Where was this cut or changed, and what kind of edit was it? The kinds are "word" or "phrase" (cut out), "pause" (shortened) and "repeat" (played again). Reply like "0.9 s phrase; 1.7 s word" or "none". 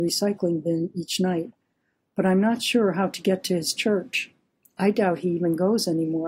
none